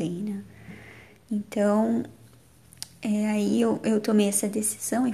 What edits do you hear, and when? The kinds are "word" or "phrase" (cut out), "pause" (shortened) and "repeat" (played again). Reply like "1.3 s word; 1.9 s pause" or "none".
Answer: none